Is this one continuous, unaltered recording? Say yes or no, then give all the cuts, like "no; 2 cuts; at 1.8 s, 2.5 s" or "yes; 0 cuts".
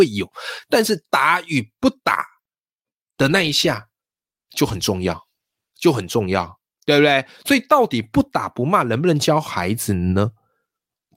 yes; 0 cuts